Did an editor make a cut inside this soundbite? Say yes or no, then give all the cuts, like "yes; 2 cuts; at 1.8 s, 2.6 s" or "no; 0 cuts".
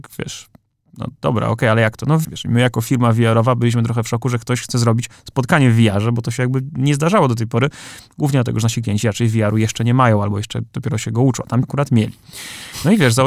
yes; 2 cuts; at 2.2 s, 11.6 s